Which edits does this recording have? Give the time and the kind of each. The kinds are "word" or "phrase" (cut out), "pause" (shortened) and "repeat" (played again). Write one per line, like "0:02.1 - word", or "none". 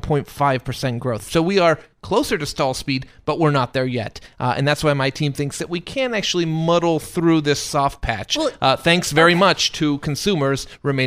none

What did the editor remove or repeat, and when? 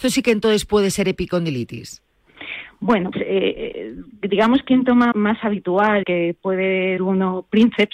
0:03.1 - word
0:04.7 - word
0:05.1 - word
0:06.0 - word
0:07.0 - word

